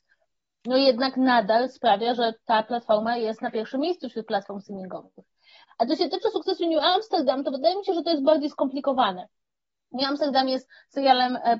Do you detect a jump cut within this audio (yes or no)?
no